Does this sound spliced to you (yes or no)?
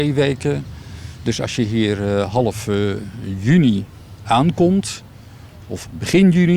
no